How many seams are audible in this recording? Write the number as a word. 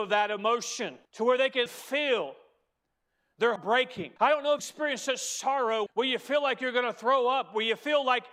six